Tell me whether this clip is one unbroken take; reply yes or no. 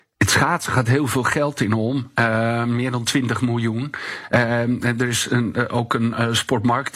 yes